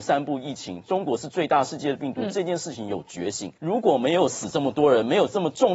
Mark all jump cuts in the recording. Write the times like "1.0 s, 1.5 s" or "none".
3.6 s